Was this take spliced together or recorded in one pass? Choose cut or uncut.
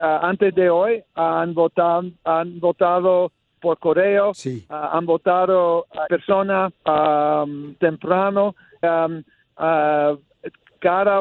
cut